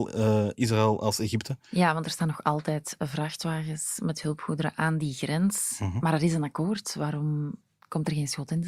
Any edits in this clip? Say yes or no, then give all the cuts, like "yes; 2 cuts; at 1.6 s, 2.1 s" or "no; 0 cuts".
no; 0 cuts